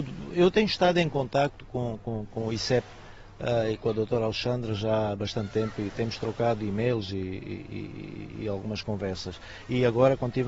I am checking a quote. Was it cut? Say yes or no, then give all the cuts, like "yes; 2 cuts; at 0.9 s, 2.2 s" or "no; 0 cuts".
no; 0 cuts